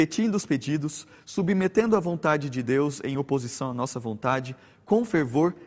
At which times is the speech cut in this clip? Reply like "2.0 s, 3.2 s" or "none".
none